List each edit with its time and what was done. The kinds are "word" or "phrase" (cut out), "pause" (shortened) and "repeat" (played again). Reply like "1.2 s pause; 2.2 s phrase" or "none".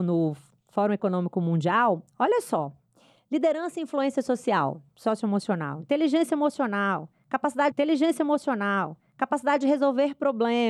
7.7 s repeat